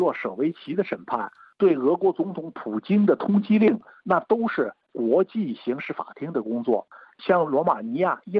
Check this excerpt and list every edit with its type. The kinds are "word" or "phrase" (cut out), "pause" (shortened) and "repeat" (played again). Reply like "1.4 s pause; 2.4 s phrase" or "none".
none